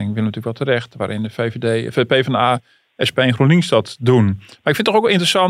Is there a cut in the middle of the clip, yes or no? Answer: no